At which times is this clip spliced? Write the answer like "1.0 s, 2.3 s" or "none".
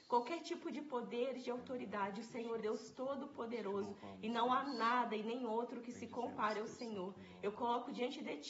2.6 s